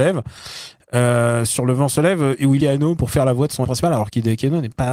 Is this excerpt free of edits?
no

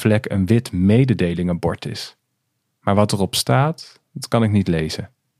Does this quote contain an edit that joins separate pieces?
no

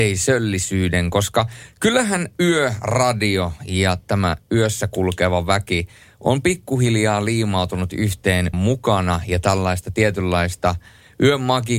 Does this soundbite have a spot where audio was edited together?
yes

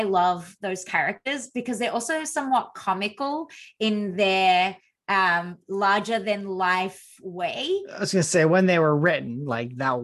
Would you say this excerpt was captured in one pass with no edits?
yes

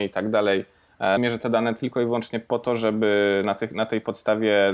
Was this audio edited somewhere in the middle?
yes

